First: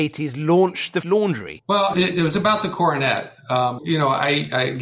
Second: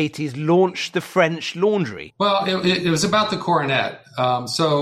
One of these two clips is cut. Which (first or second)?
first